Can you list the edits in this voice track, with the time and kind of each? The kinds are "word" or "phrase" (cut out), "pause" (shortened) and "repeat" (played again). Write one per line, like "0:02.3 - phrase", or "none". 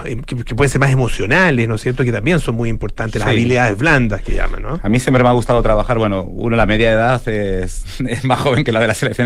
none

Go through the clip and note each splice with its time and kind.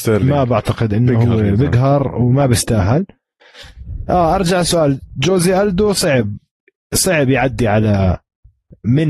none

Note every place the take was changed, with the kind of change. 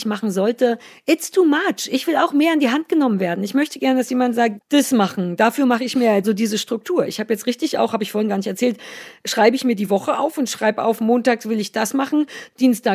0:04.6 - word
0:06.2 - word

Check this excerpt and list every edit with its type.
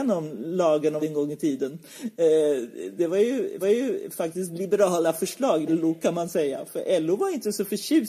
0:01.0 - word
0:03.6 - repeat
0:05.7 - word

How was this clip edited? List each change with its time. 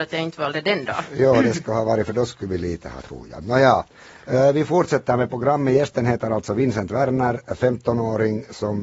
0:03.0 - word

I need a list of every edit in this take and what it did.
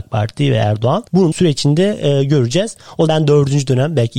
0:01.3 - word
0:03.1 - word

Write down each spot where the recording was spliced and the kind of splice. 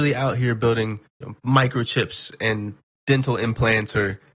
0:01.2 - word
0:02.9 - word

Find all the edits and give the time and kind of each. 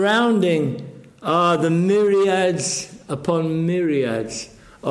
none

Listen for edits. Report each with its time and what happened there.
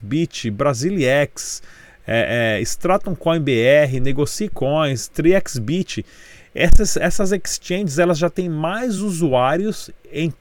none

